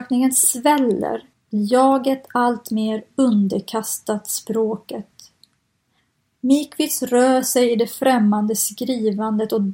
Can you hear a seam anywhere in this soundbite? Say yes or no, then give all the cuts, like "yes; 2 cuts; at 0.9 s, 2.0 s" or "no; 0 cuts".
no; 0 cuts